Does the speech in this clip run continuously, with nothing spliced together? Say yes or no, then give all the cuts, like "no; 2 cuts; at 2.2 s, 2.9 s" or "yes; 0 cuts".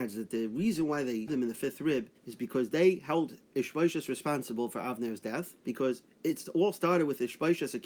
no; 3 cuts; at 1.3 s, 2.2 s, 5.6 s